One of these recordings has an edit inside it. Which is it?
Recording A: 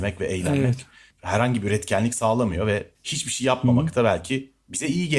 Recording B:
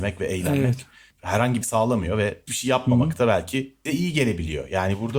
B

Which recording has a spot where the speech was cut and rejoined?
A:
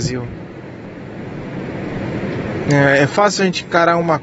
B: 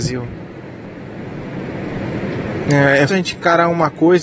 B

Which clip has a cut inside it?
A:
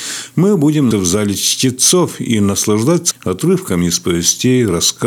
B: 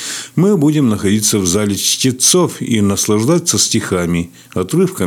A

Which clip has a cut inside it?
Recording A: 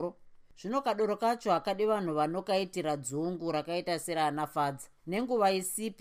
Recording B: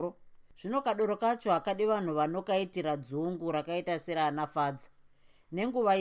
A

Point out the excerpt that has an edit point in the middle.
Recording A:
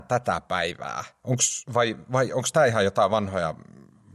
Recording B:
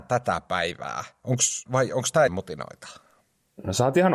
B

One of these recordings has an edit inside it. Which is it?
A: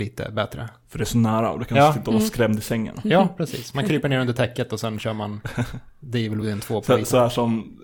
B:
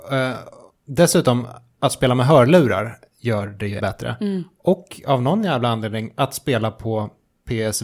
B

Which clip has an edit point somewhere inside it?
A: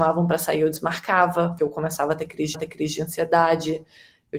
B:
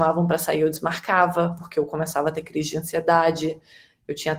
A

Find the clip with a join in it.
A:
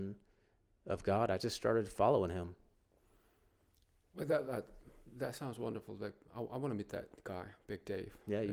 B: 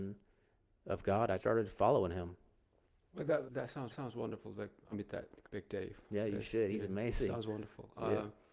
B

